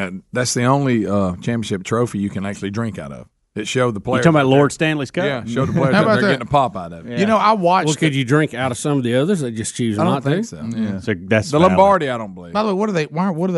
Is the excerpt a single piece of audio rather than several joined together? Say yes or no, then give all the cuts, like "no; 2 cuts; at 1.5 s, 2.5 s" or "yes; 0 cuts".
yes; 0 cuts